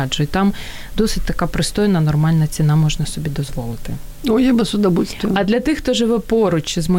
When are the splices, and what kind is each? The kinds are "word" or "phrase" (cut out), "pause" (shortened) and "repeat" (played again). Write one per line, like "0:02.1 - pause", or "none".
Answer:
none

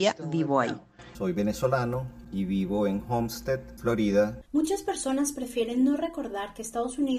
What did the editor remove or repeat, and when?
0:04.5 - pause

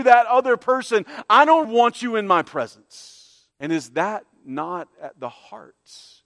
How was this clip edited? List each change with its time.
0:01.6 - word
0:03.5 - pause

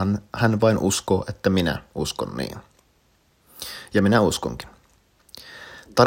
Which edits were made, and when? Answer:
none

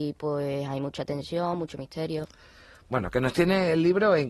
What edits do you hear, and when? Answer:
none

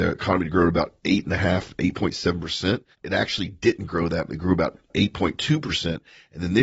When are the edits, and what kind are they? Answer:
0:02.9 - pause

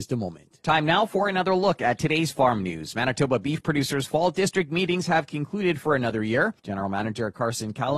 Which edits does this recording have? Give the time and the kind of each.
0:06.6 - pause

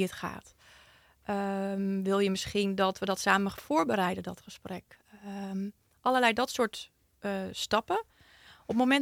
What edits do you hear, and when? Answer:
none

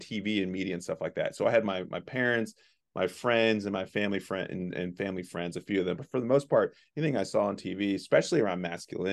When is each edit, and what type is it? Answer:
none

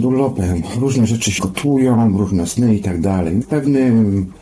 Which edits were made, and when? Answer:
0:01.4 - phrase
0:03.4 - word

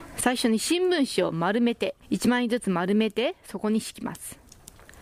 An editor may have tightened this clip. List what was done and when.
0:02.0 - pause

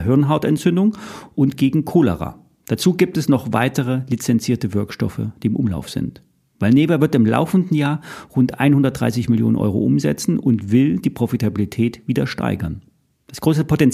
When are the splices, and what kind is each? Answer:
none

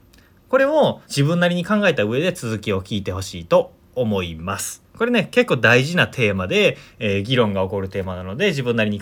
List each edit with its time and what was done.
0:01.0 - pause

